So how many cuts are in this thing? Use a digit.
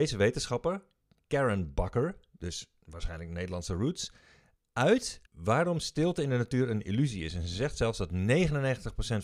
1